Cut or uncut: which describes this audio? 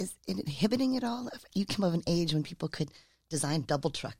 uncut